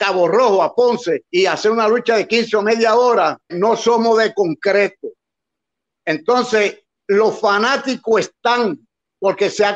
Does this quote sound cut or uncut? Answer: cut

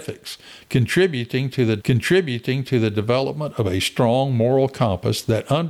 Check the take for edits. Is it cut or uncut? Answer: cut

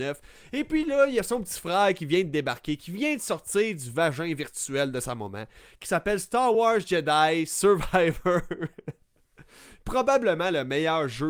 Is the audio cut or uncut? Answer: uncut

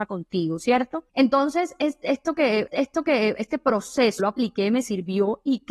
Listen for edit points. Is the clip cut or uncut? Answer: cut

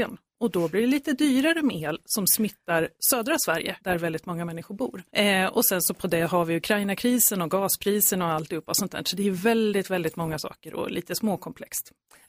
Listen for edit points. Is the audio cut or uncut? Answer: cut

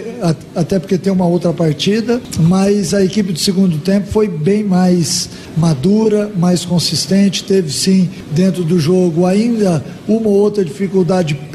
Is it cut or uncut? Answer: uncut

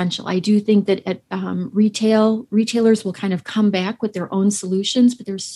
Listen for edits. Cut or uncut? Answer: uncut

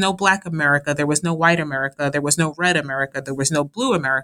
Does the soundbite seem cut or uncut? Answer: uncut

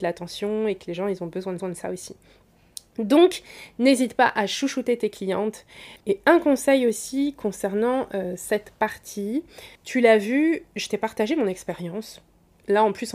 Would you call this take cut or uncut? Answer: cut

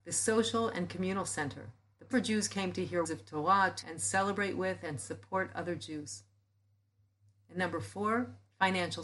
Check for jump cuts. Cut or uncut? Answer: cut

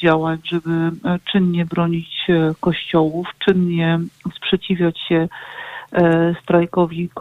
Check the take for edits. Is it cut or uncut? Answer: uncut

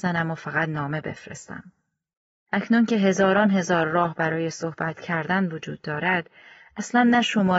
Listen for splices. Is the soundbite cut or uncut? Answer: uncut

